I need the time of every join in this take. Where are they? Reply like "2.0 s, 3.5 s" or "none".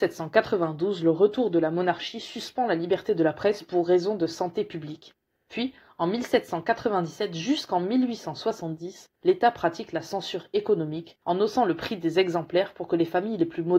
none